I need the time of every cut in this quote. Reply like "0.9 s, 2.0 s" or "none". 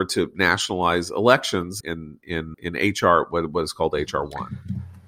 1.8 s, 2.5 s